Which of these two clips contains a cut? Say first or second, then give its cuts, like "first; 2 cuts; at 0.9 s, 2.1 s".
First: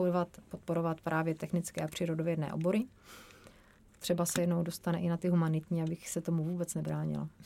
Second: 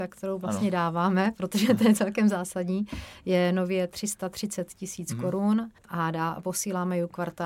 second; 1 cut; at 5.8 s